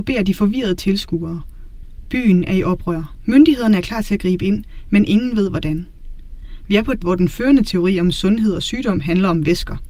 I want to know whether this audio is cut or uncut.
cut